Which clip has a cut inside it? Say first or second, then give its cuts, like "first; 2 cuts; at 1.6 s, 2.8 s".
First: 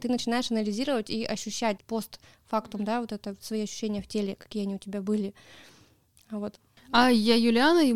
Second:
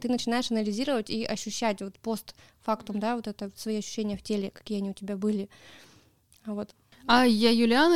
first; 1 cut; at 1.8 s